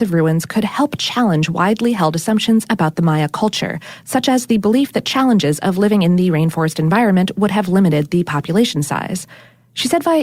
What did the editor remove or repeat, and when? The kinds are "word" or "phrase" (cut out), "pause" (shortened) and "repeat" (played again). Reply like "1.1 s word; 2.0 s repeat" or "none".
none